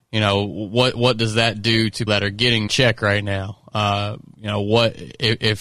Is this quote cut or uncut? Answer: cut